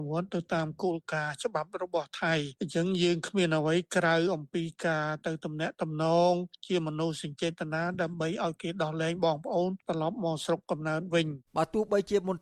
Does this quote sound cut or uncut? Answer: cut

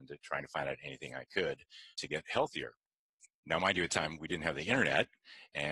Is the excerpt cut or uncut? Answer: cut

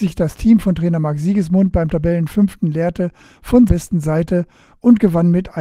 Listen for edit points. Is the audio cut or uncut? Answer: cut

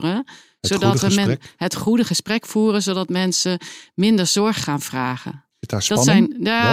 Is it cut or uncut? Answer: cut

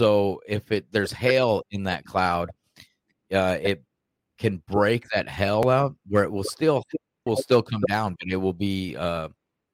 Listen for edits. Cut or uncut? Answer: cut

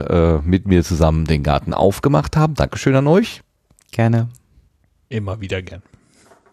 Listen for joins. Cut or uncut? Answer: uncut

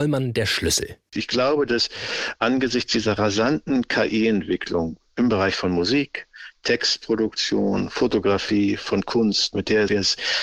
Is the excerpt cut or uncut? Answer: uncut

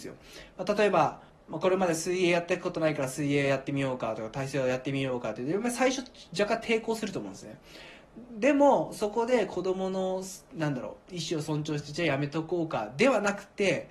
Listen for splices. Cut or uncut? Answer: cut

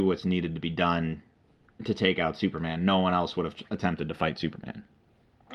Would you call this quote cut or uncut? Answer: uncut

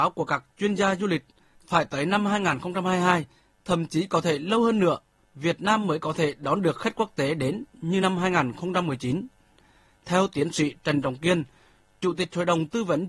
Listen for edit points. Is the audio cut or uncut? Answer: uncut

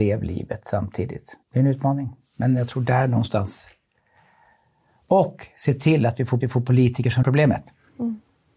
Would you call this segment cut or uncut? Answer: cut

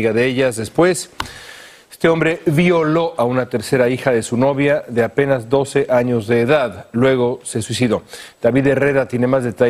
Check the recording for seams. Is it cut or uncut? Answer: uncut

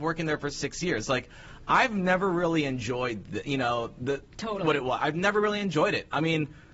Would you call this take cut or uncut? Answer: uncut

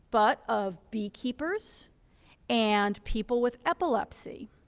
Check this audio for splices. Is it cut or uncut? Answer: uncut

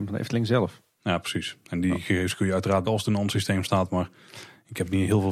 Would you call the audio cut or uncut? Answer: cut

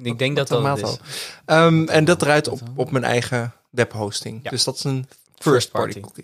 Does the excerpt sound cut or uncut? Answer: cut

